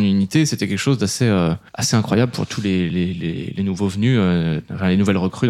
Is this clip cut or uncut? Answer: uncut